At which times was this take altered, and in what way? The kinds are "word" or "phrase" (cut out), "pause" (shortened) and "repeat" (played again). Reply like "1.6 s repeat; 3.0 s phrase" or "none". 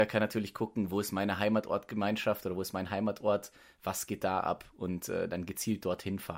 none